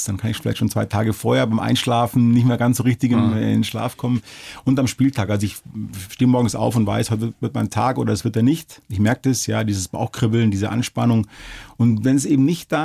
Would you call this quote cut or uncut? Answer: uncut